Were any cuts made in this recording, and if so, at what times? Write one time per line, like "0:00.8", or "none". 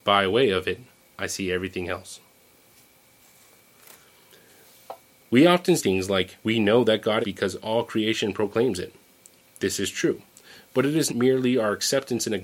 0:05.8
0:06.4
0:07.2
0:11.1